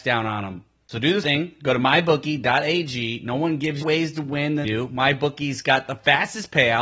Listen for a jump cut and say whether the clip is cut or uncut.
cut